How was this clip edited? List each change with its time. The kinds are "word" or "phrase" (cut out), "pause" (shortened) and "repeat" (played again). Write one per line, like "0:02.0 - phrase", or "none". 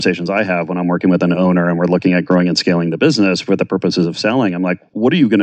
none